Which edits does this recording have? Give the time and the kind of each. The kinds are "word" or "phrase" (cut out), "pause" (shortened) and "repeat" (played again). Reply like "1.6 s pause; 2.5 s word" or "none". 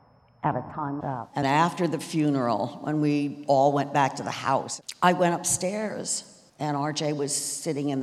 1.0 s word; 1.4 s word; 6.5 s pause